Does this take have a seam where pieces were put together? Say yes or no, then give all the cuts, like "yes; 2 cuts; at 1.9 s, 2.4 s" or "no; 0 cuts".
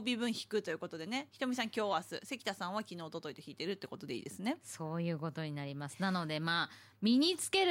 no; 0 cuts